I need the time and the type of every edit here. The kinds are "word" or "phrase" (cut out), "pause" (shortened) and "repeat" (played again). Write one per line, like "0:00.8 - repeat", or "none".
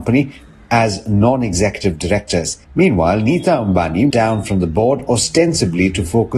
0:02.6 - pause
0:04.1 - phrase

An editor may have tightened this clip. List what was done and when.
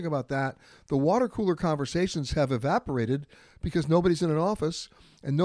none

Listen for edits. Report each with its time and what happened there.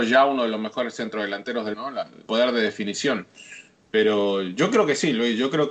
0:01.7 - word
0:02.3 - word

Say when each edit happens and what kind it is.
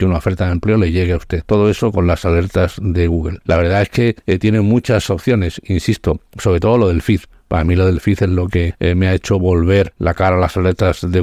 0:06.3 - pause

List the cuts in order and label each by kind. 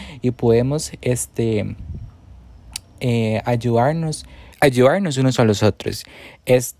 0:04.5 - pause

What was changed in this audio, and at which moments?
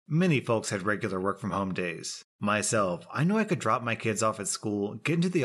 none

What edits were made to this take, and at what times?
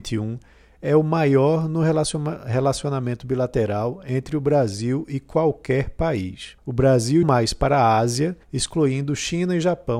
0:06.6 - pause
0:07.2 - word
0:08.4 - pause

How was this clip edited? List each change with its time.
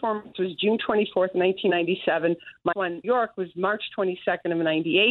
0:02.7 - word
0:03.0 - phrase

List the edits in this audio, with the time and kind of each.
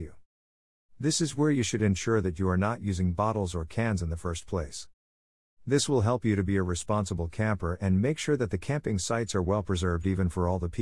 none

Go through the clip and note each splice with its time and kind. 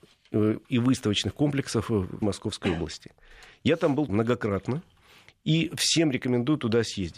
0:02.2 - phrase
0:04.1 - word

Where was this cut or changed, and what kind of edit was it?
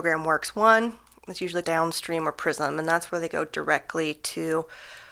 0:01.6 - word

